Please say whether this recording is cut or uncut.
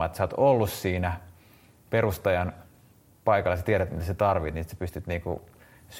uncut